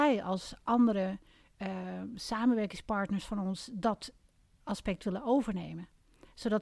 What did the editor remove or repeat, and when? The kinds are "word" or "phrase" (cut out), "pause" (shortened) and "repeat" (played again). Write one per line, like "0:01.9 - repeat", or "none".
none